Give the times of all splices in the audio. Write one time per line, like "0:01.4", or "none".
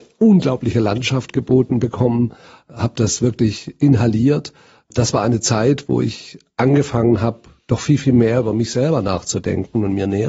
none